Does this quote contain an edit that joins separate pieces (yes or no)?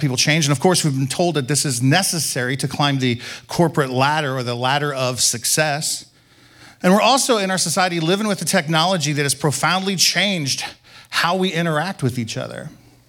no